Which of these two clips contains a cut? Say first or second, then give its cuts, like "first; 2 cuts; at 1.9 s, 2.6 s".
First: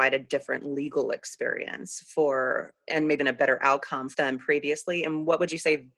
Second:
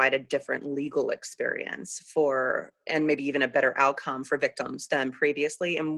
first; 2 cuts; at 3.2 s, 4.1 s